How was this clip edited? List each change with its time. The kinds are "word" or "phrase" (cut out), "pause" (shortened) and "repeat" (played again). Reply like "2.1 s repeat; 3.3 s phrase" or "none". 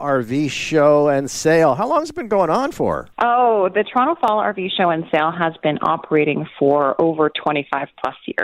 3.1 s pause